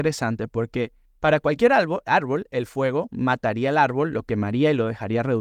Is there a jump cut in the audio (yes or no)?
no